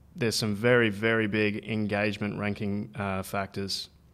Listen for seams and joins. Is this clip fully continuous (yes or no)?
yes